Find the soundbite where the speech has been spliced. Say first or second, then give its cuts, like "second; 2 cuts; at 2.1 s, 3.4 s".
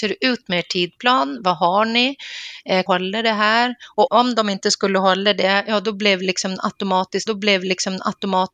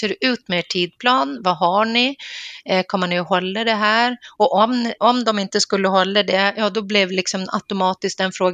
first; 3 cuts; at 2.9 s, 4.1 s, 7.3 s